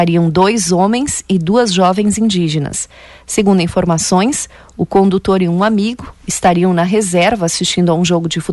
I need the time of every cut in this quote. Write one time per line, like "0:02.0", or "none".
none